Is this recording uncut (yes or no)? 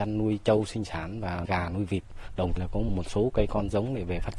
no